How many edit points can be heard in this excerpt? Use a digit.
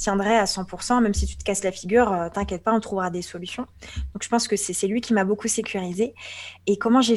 0